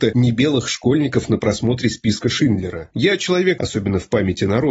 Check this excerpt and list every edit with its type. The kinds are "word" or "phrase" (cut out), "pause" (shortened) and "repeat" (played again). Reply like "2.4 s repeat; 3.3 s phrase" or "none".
3.6 s word